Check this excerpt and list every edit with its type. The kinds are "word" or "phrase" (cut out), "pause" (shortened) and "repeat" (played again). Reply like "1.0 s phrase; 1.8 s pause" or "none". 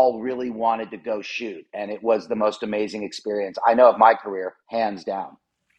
4.6 s pause